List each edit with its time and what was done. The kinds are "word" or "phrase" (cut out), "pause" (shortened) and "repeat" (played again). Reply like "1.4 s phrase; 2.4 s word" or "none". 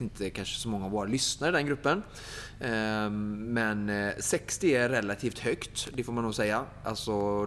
none